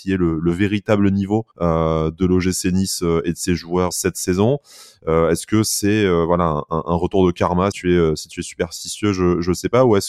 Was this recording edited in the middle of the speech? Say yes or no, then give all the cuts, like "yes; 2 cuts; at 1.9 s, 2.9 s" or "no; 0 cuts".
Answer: yes; 3 cuts; at 1.5 s, 3.9 s, 7.7 s